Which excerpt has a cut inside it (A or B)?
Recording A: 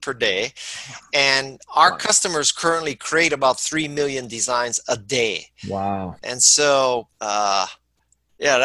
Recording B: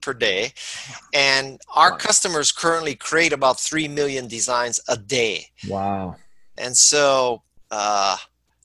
A